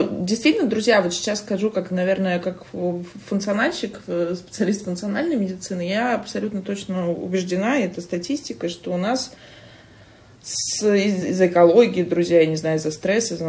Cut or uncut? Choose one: uncut